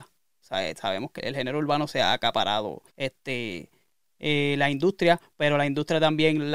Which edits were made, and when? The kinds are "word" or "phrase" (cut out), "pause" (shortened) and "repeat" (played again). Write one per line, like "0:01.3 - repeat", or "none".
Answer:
0:01.2 - word
0:02.9 - pause